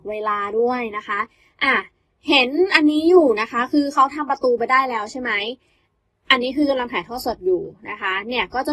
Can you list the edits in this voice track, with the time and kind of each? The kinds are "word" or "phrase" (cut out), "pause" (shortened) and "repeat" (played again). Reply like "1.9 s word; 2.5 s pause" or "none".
none